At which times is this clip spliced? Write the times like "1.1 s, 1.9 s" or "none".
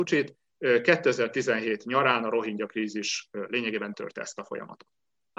3.9 s